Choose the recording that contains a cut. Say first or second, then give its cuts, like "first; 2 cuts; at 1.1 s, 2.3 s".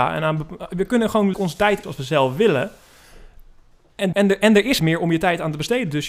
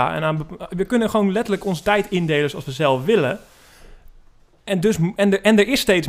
first; 4 cuts; at 1.3 s, 1.8 s, 4.1 s, 4.8 s